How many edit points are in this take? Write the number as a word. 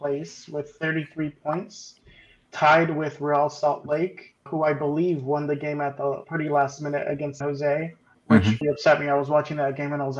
five